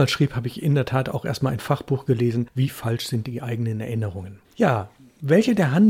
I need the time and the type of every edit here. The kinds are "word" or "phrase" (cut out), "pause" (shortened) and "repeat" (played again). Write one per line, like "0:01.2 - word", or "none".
0:04.4 - pause